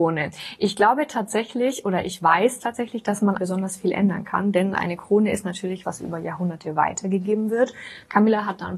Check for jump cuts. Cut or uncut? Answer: cut